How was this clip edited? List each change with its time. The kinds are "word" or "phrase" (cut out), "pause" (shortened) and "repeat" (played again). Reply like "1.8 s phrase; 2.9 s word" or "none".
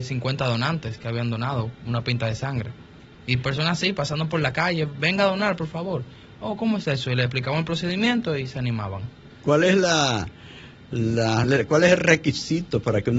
11.4 s word